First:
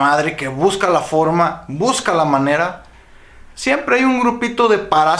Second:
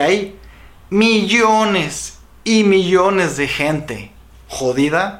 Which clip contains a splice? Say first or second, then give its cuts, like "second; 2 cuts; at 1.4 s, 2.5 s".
first; 1 cut; at 3.5 s